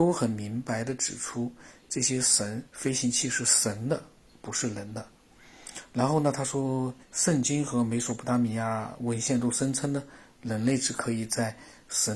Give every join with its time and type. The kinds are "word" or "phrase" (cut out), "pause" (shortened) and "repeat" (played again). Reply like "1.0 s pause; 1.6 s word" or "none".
2.7 s pause; 7.0 s pause

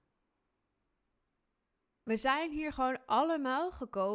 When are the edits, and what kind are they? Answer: none

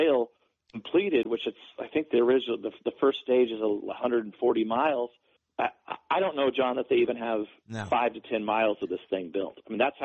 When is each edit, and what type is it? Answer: 5.4 s pause

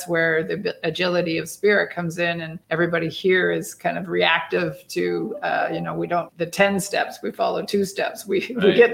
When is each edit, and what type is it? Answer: 2.6 s pause; 6.3 s phrase

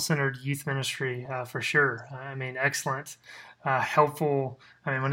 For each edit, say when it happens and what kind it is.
none

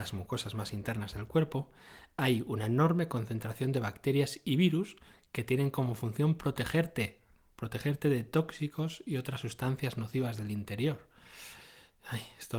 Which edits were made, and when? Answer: none

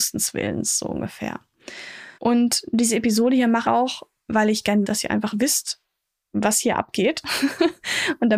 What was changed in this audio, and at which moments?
2.1 s pause; 3.6 s word; 4.8 s word

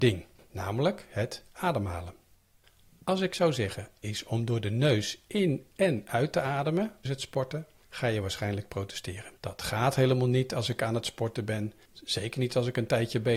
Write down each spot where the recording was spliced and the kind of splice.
4.0 s phrase; 7.1 s word; 9.4 s pause

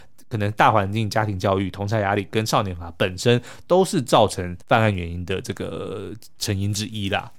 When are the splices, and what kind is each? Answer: 4.6 s pause

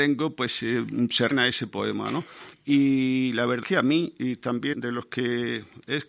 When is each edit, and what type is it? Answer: 1.3 s word; 3.6 s word; 4.7 s word

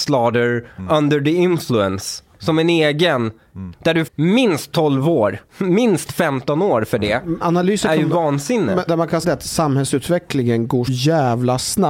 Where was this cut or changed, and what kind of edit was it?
3.7 s word; 4.1 s word; 5.5 s pause; 7.4 s word; 8.9 s word; 9.2 s word; 10.9 s word

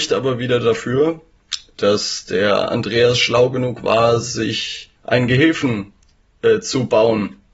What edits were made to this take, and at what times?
5.0 s pause

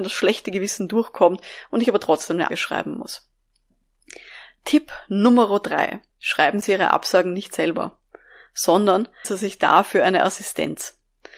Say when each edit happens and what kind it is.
2.5 s word; 6.1 s pause; 9.2 s word

